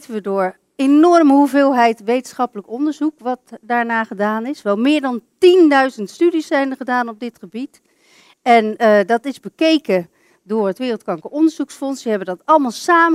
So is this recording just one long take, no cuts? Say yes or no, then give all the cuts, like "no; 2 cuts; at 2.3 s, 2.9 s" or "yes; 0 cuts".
yes; 0 cuts